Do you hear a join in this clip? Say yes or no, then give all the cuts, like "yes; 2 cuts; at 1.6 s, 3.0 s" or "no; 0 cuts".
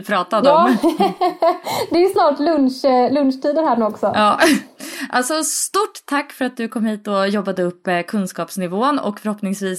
no; 0 cuts